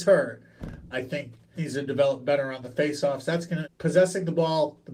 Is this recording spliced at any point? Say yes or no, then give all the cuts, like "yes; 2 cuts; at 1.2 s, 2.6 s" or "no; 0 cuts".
yes; 3 cuts; at 0.9 s, 1.5 s, 3.6 s